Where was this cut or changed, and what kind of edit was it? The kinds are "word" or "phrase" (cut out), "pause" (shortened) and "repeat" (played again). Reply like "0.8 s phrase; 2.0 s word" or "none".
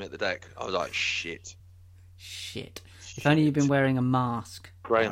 none